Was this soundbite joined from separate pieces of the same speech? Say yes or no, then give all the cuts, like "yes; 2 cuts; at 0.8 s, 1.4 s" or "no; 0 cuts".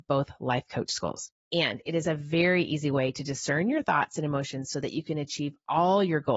yes; 1 cut; at 1.4 s